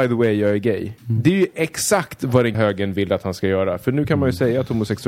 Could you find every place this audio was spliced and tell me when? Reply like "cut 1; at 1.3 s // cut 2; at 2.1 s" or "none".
cut 1; at 1.0 s // cut 2; at 2.5 s